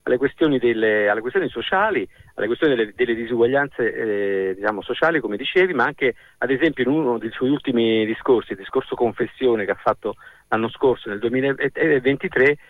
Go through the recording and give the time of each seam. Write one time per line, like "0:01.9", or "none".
none